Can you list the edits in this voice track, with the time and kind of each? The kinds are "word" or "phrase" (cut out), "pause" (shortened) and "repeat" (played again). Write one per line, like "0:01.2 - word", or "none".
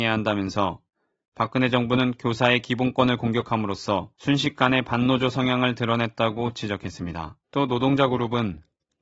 0:04.1 - pause
0:07.4 - pause